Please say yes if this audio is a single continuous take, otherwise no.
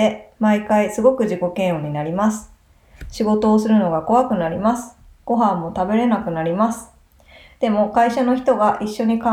yes